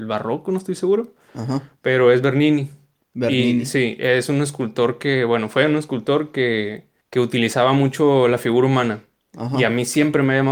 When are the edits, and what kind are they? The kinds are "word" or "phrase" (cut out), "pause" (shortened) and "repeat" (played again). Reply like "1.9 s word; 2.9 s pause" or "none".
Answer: none